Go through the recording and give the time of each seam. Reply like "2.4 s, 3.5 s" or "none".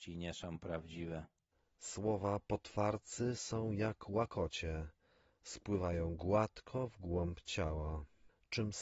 none